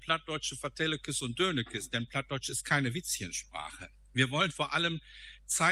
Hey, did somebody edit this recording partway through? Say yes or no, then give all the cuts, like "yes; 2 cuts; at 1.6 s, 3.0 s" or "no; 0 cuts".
no; 0 cuts